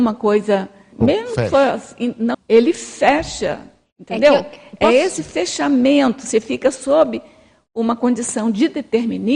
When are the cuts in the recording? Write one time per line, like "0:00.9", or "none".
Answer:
0:00.9
0:02.3

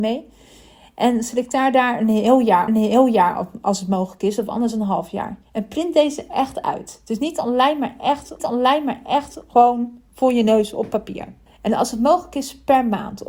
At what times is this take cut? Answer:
0:02.7
0:05.4
0:08.4
0:11.5

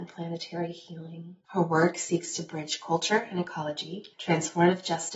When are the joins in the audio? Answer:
0:01.4
0:04.1

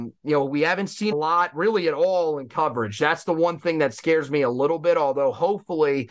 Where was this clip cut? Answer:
0:01.1

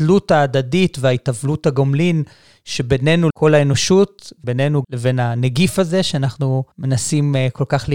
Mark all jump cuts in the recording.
0:03.3
0:04.8
0:06.7

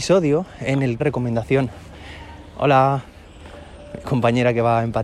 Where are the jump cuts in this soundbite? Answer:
0:01.0

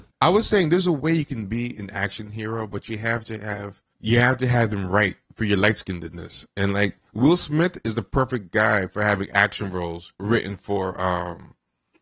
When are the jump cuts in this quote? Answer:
0:10.1

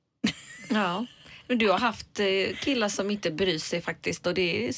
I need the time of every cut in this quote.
none

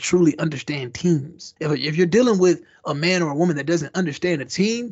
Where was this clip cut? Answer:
0:01.6

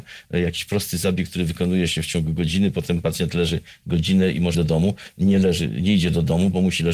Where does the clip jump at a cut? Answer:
0:04.5

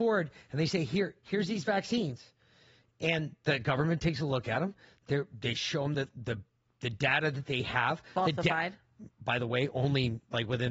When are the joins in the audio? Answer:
none

